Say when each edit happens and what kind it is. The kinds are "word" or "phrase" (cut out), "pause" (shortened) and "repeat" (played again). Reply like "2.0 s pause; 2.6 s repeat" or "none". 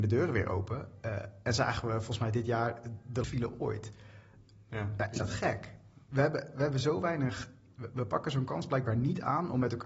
3.2 s word; 5.2 s word

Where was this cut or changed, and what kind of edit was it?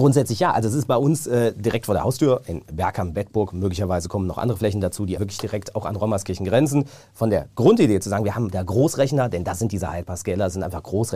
5.2 s word

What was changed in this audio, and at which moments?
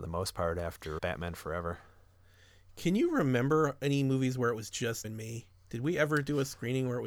1.0 s word; 5.0 s word

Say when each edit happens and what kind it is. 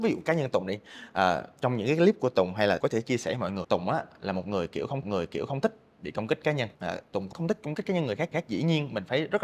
2.8 s word; 3.6 s word; 5.0 s repeat; 6.7 s pause; 7.3 s word; 8.3 s repeat

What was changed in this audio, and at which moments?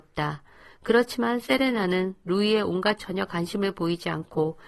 3.0 s word

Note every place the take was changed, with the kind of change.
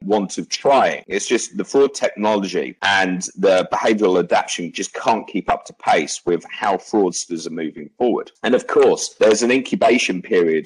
none

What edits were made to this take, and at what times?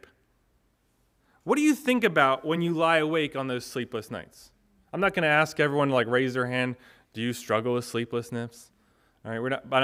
none

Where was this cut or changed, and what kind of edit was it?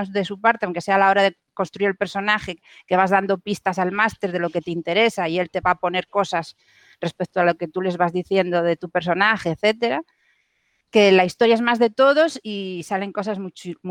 none

